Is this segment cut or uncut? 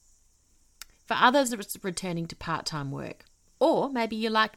uncut